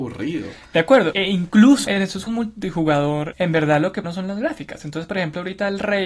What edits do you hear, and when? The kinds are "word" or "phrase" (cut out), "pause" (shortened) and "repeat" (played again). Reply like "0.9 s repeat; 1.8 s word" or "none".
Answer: 1.1 s word; 1.9 s word; 2.3 s word; 3.3 s word; 4.0 s word